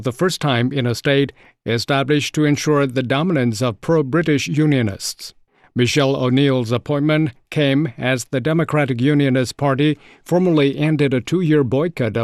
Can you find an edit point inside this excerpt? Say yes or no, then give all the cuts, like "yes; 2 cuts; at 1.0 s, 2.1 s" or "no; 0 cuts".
no; 0 cuts